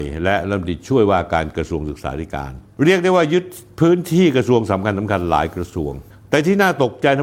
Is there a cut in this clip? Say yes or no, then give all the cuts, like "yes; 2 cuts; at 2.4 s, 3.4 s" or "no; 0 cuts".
no; 0 cuts